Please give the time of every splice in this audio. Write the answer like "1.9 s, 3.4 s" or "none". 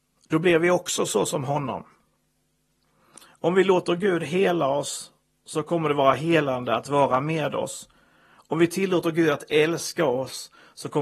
none